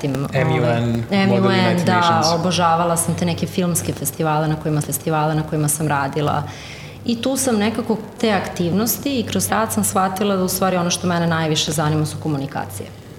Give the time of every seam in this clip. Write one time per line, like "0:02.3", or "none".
0:04.8
0:08.2
0:09.5